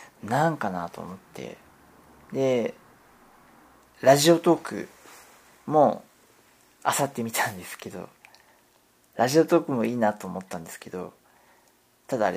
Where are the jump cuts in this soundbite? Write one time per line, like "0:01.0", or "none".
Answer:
none

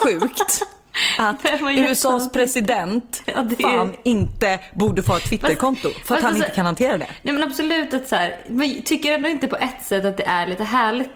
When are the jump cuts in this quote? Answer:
none

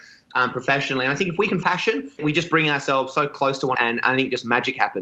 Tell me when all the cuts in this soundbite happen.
0:01.6
0:02.2
0:03.7

